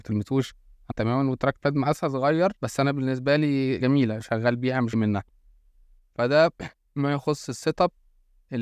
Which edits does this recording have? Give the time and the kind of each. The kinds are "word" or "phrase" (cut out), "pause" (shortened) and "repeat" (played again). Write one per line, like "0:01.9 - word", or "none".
0:00.9 - phrase
0:02.6 - pause
0:03.8 - word
0:04.9 - word